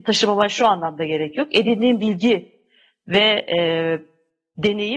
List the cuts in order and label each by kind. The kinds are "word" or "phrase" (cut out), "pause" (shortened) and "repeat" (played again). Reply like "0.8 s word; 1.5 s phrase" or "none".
none